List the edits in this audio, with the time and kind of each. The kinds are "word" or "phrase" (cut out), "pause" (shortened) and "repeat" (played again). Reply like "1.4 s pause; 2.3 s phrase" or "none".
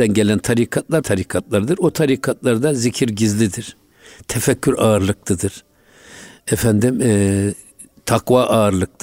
1.0 s word